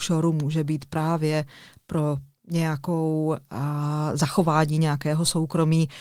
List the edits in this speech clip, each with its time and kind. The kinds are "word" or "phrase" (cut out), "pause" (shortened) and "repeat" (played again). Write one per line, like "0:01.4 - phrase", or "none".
none